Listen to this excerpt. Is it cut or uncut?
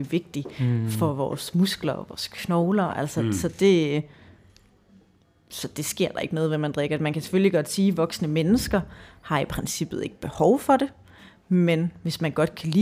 uncut